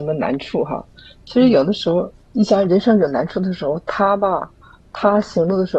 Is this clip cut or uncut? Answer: cut